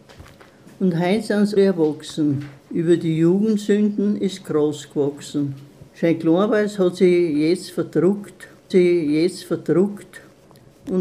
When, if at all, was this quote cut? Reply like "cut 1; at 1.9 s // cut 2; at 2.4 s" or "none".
cut 1; at 1.6 s // cut 2; at 2.6 s // cut 3; at 5.9 s // cut 4; at 8.7 s